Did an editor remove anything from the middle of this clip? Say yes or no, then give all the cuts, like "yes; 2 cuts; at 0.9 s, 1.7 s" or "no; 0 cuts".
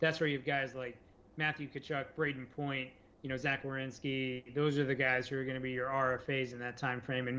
no; 0 cuts